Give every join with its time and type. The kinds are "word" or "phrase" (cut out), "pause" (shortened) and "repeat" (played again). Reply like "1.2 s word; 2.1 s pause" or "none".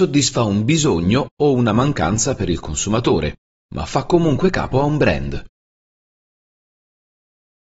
none